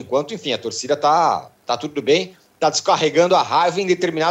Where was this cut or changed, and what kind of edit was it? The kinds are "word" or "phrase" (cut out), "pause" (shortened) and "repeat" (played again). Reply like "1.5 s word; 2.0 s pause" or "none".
1.6 s pause